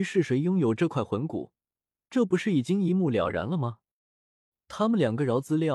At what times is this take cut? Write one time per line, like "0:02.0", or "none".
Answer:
none